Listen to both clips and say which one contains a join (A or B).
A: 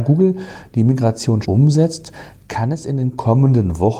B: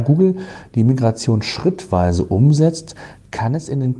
A